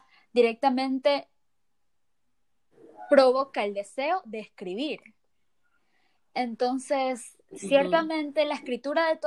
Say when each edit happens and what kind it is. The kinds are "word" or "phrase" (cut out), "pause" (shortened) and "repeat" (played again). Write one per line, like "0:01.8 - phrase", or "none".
none